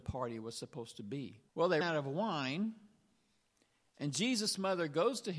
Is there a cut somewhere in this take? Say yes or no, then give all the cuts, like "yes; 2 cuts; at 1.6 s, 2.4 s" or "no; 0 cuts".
yes; 2 cuts; at 1.5 s, 1.8 s